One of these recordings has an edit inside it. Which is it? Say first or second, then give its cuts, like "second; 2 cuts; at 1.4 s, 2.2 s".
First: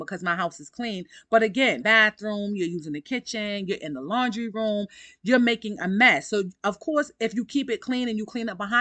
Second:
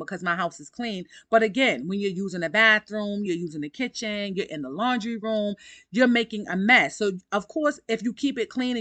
first; 1 cut; at 1.8 s